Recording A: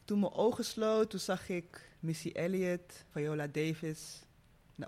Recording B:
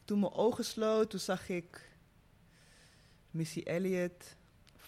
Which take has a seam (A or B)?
A